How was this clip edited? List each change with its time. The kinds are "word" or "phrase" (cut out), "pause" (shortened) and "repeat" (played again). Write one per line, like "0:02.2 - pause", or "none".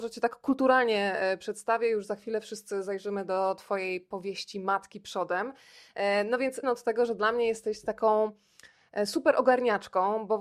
0:06.6 - word